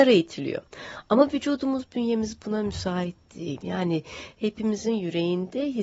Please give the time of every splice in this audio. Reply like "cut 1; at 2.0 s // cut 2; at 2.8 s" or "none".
none